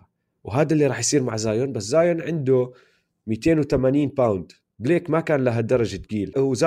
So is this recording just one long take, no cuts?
no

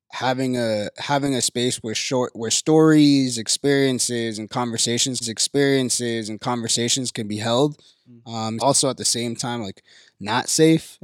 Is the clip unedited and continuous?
no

